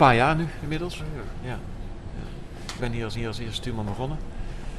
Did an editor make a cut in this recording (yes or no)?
yes